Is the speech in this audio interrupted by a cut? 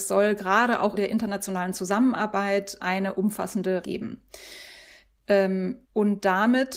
yes; 4 cuts; at 1.0 s, 2.8 s, 3.8 s, 5.8 s

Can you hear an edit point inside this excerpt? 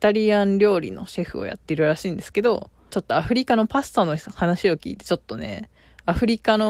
yes; 1 cut; at 2.9 s

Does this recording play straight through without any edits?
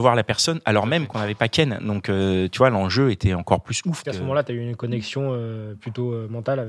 no; 1 cut; at 4.0 s

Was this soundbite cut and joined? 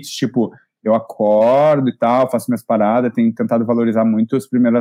no; 0 cuts

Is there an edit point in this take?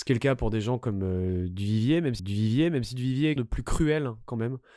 yes; 2 cuts; at 2.2 s, 3.4 s

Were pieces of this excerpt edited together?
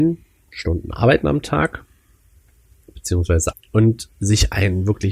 yes; 2 cuts; at 1.2 s, 3.5 s

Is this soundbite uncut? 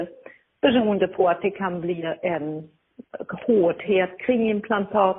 yes; 0 cuts

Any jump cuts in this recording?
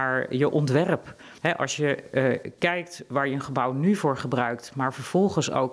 yes; 1 cut; at 1.4 s

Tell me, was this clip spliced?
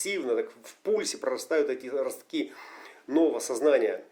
no; 0 cuts

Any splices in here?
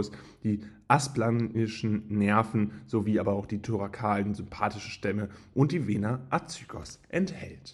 no; 0 cuts

